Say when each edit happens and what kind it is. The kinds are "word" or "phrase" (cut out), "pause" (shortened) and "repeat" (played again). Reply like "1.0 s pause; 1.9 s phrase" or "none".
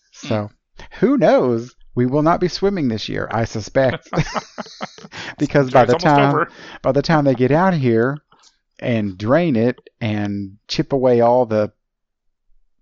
10.6 s pause